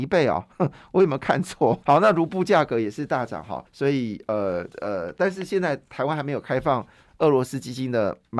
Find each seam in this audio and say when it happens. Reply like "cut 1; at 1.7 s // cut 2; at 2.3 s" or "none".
cut 1; at 1.8 s // cut 2; at 3.7 s // cut 3; at 4.7 s